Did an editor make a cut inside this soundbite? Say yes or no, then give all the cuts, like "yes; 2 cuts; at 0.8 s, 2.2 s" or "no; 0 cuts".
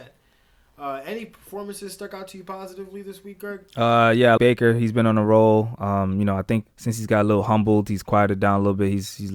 yes; 2 cuts; at 4.4 s, 6.7 s